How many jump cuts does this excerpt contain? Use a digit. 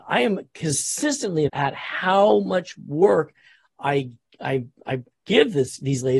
1